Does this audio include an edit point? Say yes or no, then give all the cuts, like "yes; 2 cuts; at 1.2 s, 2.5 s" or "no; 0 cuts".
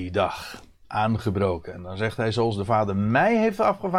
no; 0 cuts